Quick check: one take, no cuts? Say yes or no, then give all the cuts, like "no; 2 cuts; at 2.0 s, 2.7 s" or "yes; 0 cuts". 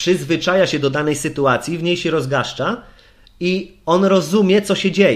yes; 0 cuts